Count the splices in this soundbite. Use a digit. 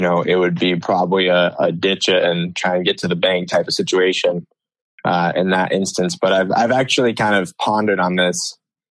0